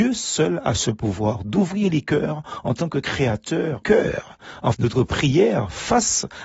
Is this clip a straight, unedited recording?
no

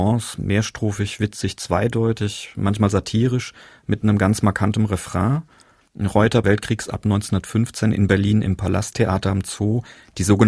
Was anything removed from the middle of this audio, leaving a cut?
yes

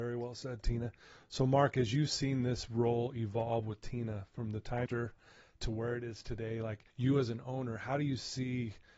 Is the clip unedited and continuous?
no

